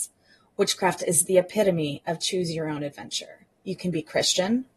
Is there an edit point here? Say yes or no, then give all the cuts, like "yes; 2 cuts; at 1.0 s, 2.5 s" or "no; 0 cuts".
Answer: no; 0 cuts